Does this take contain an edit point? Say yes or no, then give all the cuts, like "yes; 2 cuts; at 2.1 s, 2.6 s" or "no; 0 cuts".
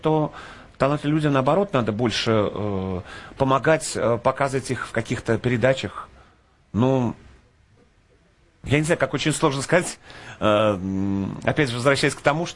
no; 0 cuts